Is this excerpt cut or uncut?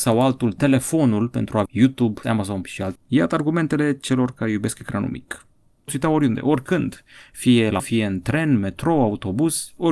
cut